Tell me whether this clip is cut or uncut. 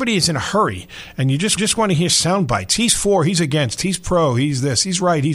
cut